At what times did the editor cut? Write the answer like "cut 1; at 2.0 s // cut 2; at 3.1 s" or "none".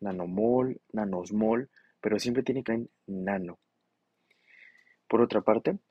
cut 1; at 2.7 s